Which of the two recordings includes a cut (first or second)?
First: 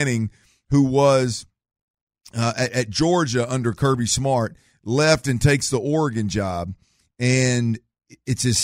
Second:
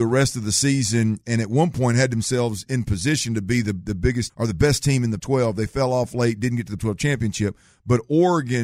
second